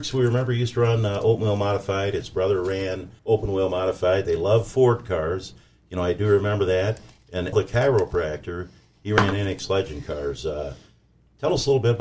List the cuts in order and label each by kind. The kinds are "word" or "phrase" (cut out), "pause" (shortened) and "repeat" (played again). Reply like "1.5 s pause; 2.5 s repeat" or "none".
3.2 s pause; 7.5 s word